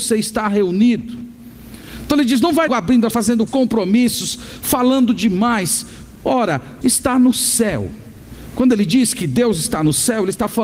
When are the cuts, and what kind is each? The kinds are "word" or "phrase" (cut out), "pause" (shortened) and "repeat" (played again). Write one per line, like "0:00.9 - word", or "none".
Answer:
0:02.7 - word
0:03.1 - phrase
0:03.5 - word
0:06.8 - word